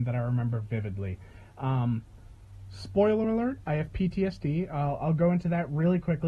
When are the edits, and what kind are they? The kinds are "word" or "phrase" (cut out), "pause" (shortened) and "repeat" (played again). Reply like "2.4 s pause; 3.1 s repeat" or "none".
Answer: none

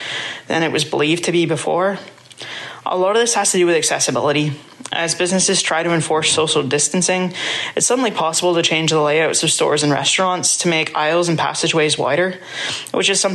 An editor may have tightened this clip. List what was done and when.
none

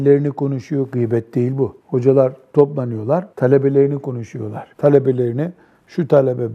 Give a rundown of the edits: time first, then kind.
1.8 s pause; 3.3 s pause; 4.7 s pause

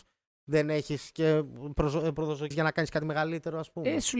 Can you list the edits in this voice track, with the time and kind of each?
2.5 s word

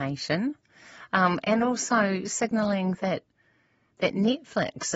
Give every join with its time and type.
none

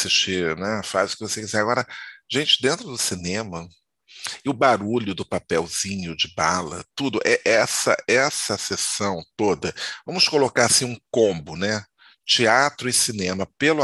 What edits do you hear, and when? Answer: none

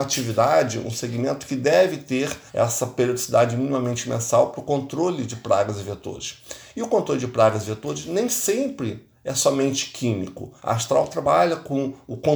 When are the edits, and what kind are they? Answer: 2.5 s pause; 10.6 s pause

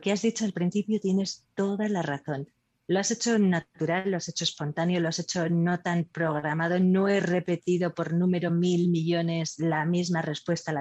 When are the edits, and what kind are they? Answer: none

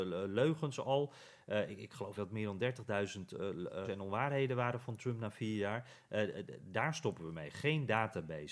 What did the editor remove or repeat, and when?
2.2 s word; 3.8 s word

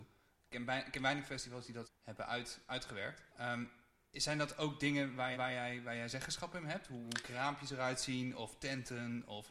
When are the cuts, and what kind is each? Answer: 1.8 s word; 3.3 s pause; 5.3 s repeat

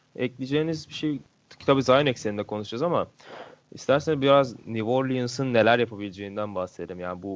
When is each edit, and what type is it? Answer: none

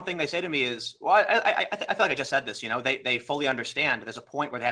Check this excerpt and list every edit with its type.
none

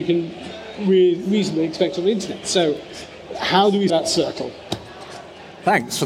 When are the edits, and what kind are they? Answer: 3.9 s word

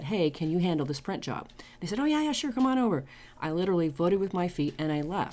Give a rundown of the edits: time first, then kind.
none

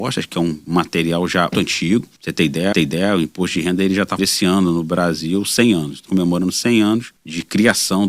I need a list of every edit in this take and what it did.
1.5 s word; 2.2 s pause; 2.7 s repeat; 4.2 s word; 6.1 s word; 7.2 s pause

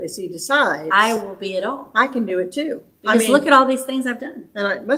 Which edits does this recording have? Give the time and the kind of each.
none

